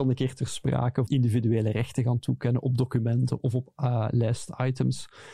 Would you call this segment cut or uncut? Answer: cut